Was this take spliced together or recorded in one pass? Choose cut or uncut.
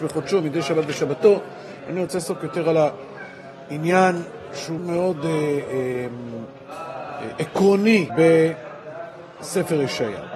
cut